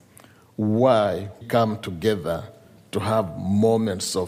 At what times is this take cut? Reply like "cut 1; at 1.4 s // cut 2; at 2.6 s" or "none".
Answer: cut 1; at 1.4 s